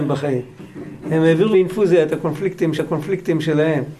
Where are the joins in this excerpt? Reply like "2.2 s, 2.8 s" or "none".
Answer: 1.5 s, 2.8 s

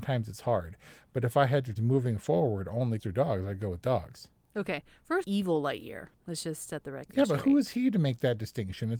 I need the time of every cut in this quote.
1.8 s, 3.0 s, 5.2 s

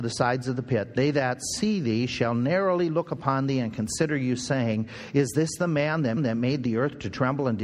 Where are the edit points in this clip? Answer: 6.2 s

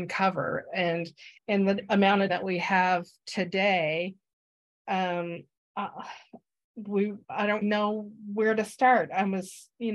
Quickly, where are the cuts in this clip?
1.4 s, 2.3 s, 5.6 s, 7.2 s, 7.6 s

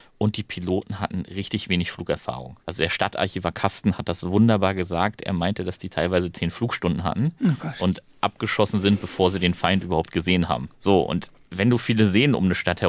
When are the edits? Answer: 2.6 s

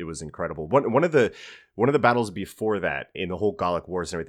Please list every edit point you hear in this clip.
3.1 s

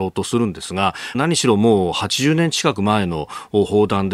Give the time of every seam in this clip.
1.1 s

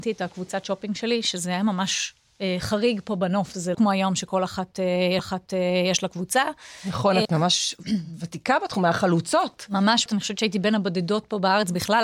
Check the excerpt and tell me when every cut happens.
3.7 s, 5.2 s, 7.2 s, 10.1 s

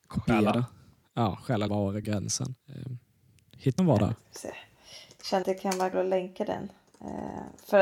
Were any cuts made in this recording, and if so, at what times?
1.7 s, 2.0 s, 2.6 s, 3.8 s, 5.4 s, 5.9 s

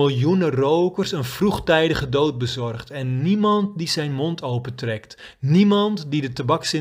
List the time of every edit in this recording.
none

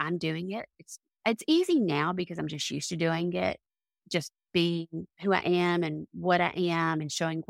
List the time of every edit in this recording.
none

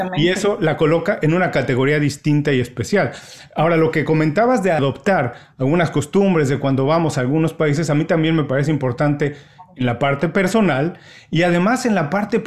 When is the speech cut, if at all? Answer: none

